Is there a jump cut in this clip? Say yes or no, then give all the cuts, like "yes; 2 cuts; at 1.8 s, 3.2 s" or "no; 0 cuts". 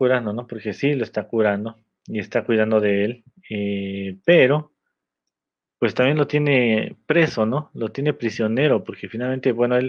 no; 0 cuts